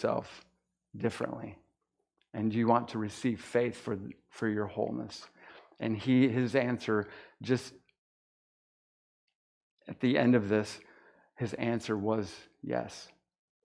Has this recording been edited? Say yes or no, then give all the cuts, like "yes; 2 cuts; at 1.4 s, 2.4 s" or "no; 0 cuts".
no; 0 cuts